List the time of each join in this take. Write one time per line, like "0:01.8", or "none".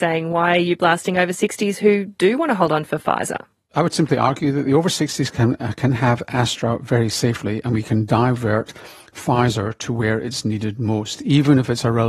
none